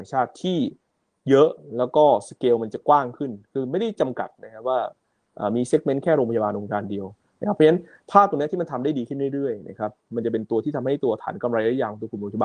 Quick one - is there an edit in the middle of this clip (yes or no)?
no